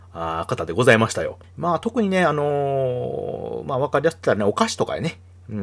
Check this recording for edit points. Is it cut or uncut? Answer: uncut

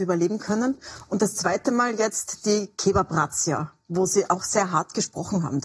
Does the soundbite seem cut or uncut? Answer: uncut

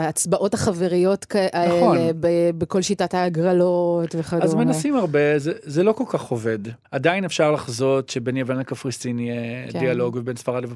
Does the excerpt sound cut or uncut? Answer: cut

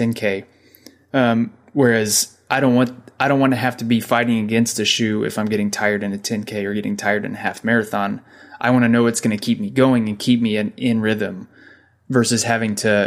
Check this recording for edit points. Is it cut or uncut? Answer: uncut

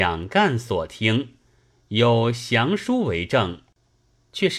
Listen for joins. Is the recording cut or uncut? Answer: uncut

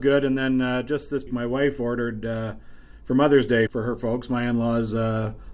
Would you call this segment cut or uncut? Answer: cut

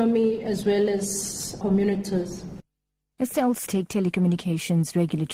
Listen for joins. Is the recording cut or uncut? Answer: cut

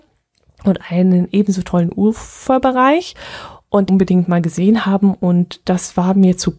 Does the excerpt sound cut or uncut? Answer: cut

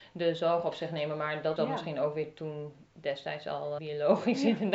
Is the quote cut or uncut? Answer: cut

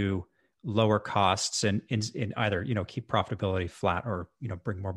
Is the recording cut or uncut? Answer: uncut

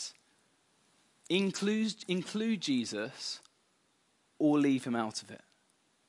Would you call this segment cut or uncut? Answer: uncut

